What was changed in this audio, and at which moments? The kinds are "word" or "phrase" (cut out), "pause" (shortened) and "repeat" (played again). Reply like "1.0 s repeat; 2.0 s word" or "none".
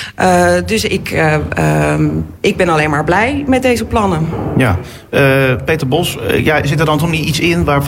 none